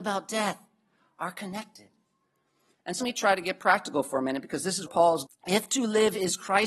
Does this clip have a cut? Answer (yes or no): yes